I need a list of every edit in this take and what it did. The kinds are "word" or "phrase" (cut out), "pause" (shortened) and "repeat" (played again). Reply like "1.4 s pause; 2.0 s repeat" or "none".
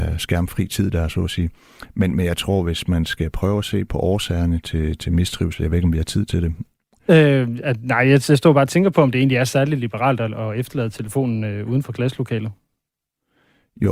none

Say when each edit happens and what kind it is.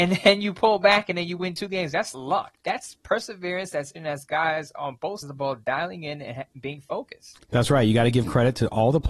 2.1 s word; 4.0 s word; 5.2 s word

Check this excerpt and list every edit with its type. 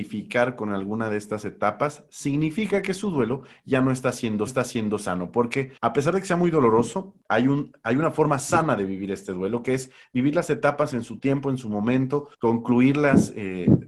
4.5 s repeat; 5.8 s pause; 7.2 s word; 12.3 s pause

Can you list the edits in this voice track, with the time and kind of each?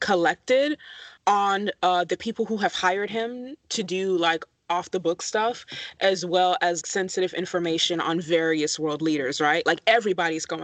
1.2 s pause; 6.8 s word

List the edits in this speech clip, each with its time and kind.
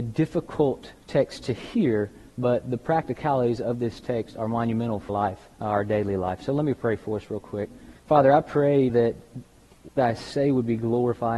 1.0 s pause; 5.1 s word; 5.5 s pause; 8.0 s pause; 8.9 s word; 10.0 s word

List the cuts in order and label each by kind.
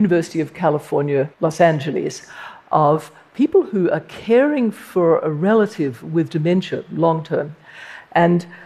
1.3 s pause

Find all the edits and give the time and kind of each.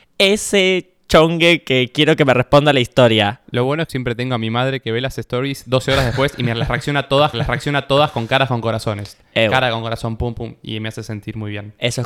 3.4 s pause; 3.9 s phrase; 7.3 s repeat; 10.2 s word

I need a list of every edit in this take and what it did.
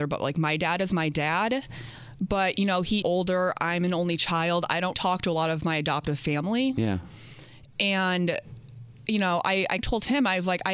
3.0 s word; 4.9 s word; 9.8 s word

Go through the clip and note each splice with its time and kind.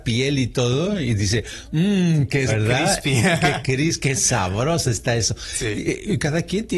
2.5 s word

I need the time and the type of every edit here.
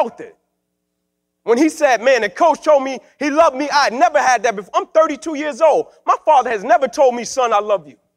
none

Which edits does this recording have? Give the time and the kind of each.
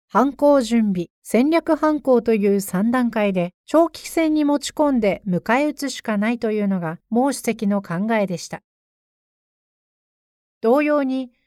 1.1 s pause; 3.6 s pause; 7.0 s pause

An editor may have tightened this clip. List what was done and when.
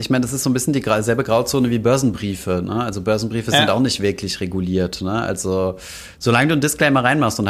none

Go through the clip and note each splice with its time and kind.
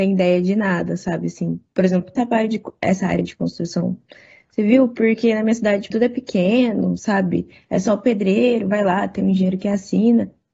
2.2 s word; 5.9 s word

